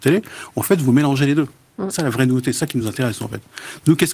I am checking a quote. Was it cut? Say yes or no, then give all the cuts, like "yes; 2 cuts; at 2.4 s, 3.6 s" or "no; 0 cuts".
no; 0 cuts